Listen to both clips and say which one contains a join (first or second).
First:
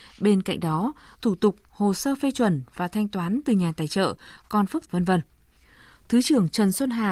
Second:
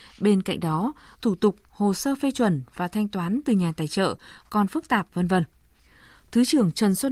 first